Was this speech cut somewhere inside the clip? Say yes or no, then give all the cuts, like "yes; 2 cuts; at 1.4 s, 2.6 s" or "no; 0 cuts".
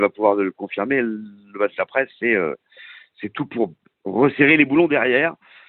no; 0 cuts